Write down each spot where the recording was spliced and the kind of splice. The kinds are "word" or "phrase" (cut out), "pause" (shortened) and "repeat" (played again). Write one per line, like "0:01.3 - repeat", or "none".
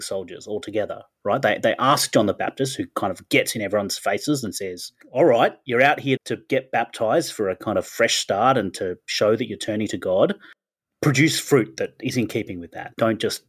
0:06.2 - word